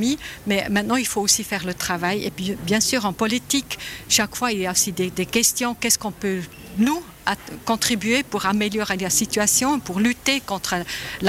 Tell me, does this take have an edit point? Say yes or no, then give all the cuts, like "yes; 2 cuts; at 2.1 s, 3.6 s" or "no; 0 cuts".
no; 0 cuts